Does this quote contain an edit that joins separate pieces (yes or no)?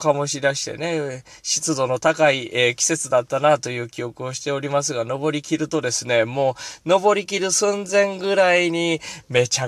no